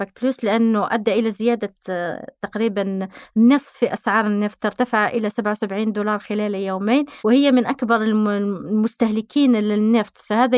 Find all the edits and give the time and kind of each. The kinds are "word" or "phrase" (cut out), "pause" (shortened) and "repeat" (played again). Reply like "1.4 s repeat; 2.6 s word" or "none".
7.2 s pause